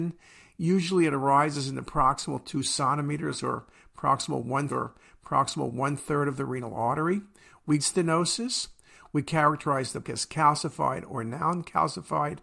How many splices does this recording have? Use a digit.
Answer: 3